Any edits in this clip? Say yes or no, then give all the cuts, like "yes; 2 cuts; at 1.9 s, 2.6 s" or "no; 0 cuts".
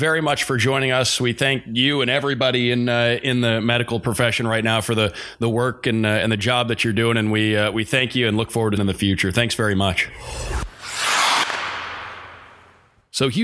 yes; 1 cut; at 8.8 s